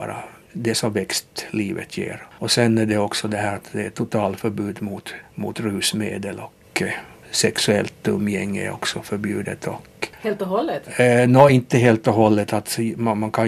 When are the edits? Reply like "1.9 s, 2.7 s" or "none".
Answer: none